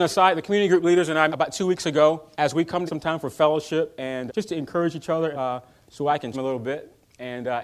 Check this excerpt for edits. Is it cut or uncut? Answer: cut